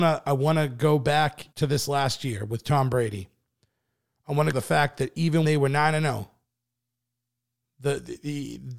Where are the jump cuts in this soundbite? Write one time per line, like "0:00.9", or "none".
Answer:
0:01.5
0:04.5
0:05.4